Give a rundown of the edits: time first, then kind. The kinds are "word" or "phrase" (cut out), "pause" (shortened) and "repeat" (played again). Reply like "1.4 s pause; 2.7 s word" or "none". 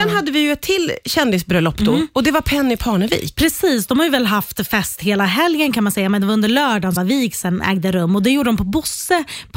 7.0 s phrase